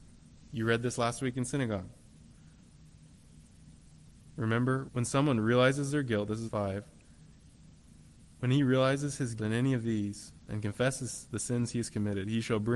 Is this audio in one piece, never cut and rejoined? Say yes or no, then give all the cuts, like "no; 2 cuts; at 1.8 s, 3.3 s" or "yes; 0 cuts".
no; 4 cuts; at 4.9 s, 6.5 s, 9.4 s, 10.5 s